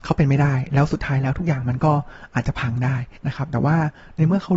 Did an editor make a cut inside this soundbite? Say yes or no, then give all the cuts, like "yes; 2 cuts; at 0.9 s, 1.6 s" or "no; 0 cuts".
yes; 1 cut; at 3.2 s